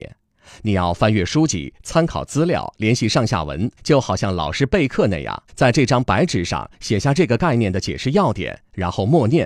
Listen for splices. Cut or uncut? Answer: cut